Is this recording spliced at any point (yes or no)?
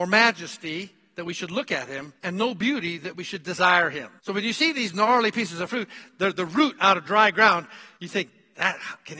yes